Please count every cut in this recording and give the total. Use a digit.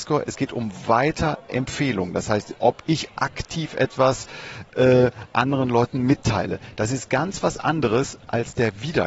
0